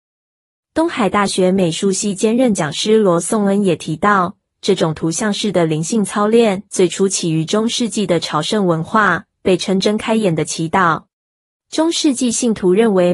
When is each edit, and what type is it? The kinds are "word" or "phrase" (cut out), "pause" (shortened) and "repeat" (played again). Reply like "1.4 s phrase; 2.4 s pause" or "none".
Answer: 6.7 s pause; 11.1 s pause